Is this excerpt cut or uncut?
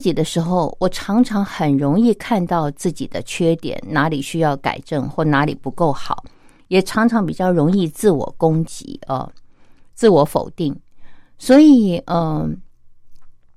uncut